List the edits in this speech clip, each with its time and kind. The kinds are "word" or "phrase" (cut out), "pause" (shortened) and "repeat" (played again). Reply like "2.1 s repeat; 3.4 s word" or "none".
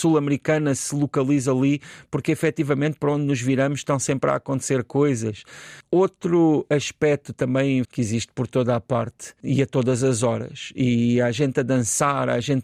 7.8 s phrase